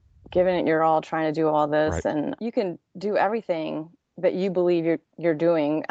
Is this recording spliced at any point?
yes; 2 cuts; at 2.4 s, 4.0 s

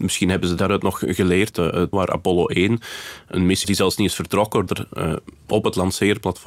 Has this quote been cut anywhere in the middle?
yes; 3 cuts; at 1.9 s, 3.6 s, 4.7 s

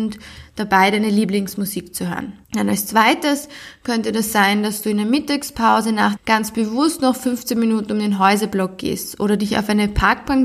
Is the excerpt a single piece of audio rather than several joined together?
no; 2 cuts; at 2.4 s, 6.2 s

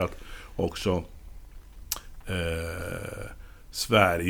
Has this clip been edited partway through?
no; 0 cuts

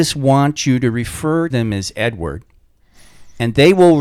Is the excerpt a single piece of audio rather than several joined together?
no; 1 cut; at 1.5 s

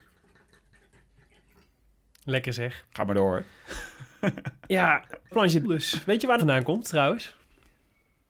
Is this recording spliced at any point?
yes; 3 cuts; at 5.3 s, 5.6 s, 6.4 s

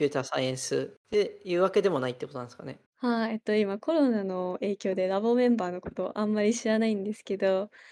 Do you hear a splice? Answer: yes; 2 cuts; at 1.0 s, 2.9 s

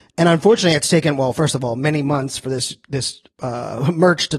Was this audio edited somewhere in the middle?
no; 0 cuts

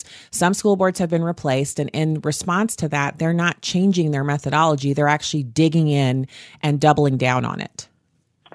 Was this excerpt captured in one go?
yes; 0 cuts

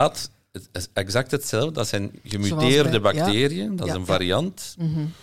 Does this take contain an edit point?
no; 0 cuts

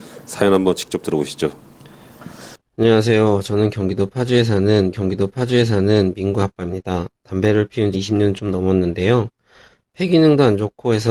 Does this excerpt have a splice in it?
yes; 4 cuts; at 2.6 s, 4.9 s, 7.1 s, 7.9 s

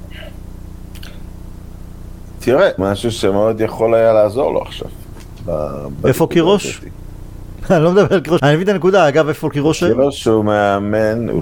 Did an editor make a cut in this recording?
yes; 3 cuts; at 2.8 s, 6.0 s, 8.4 s

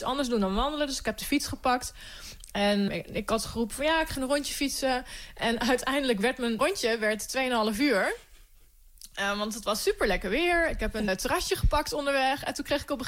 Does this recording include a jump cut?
yes; 4 cuts; at 2.9 s, 4.1 s, 6.6 s, 11.1 s

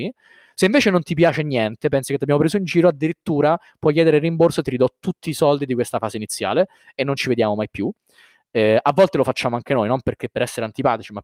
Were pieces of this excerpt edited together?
no; 0 cuts

